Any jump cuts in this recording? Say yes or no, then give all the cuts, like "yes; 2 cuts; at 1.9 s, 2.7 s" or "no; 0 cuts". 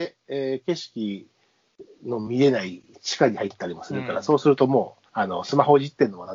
yes; 1 cut; at 5.1 s